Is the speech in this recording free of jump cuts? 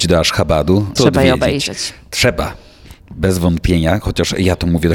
no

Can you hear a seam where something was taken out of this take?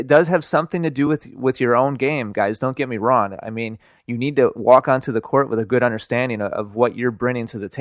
no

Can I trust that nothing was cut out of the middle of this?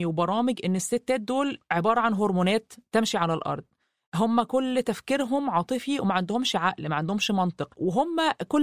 yes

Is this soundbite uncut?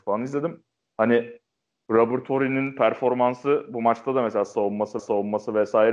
no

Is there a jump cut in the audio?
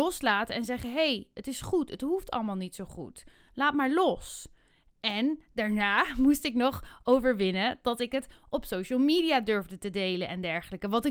no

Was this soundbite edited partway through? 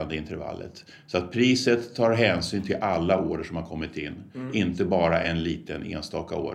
no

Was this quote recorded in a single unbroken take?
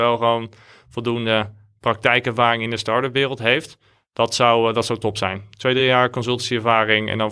yes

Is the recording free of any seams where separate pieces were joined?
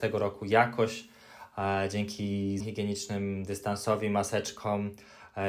no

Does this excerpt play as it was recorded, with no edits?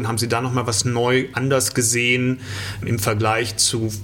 no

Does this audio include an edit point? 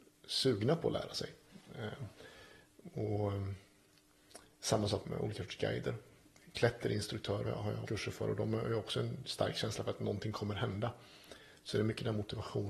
yes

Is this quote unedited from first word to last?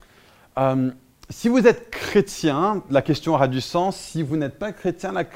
yes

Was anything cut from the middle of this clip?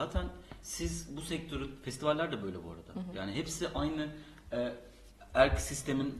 no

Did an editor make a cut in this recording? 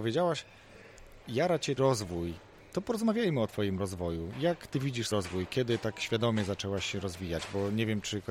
yes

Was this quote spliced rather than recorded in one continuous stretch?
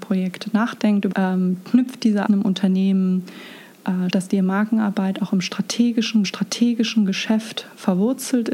yes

